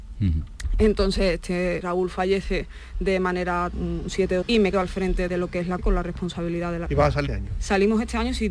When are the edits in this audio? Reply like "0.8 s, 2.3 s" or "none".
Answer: 1.8 s, 3.7 s, 4.4 s, 4.7 s, 5.3 s, 5.8 s, 6.9 s, 7.3 s